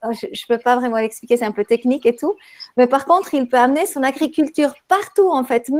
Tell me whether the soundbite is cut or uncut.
uncut